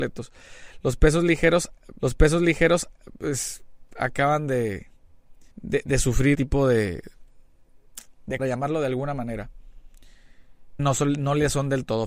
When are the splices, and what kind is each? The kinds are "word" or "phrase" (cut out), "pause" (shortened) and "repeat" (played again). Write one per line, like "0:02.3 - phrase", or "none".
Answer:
0:02.0 - repeat
0:05.5 - pause
0:06.3 - word
0:08.4 - phrase
0:10.8 - word